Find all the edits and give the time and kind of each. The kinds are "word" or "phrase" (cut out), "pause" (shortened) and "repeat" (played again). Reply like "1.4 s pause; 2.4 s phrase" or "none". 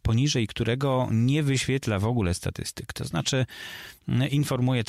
none